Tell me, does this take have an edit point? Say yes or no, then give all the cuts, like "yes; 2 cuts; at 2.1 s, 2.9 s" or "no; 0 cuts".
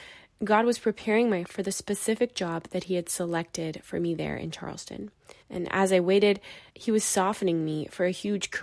yes; 3 cuts; at 1.4 s, 5.4 s, 6.7 s